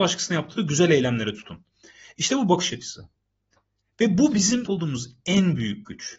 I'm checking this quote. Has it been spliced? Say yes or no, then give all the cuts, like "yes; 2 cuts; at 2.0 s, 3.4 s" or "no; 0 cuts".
yes; 1 cut; at 4.6 s